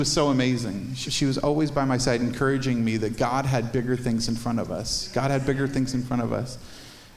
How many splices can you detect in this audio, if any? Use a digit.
1